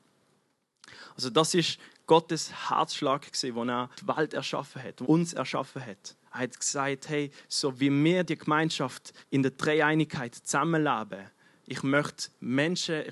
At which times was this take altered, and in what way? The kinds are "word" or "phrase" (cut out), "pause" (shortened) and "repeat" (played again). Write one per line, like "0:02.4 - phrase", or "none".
0:03.9 - pause
0:05.0 - word
0:06.2 - pause
0:09.2 - pause